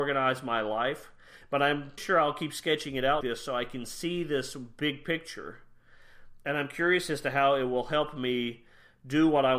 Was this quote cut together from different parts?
yes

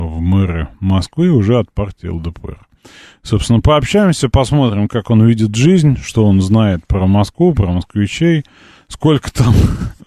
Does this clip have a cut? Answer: no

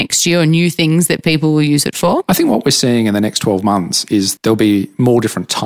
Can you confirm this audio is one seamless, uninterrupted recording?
no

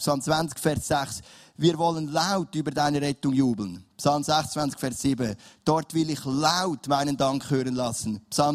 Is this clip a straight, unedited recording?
yes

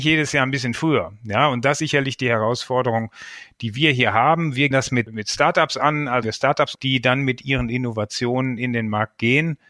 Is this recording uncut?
no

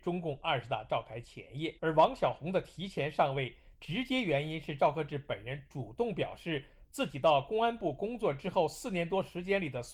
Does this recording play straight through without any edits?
no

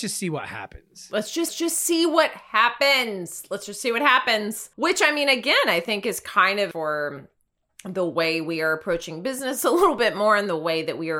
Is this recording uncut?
no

